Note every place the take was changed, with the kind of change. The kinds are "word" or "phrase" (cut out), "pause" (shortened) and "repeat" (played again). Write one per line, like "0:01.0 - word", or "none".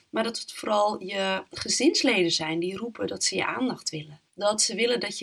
0:04.3 - pause